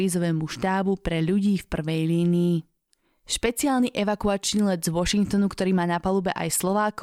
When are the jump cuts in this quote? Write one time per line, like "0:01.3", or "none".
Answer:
0:02.9